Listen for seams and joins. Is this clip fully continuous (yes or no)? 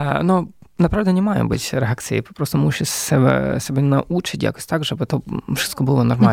yes